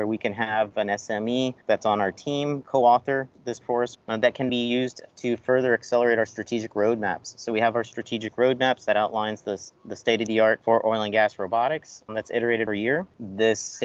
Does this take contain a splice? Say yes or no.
yes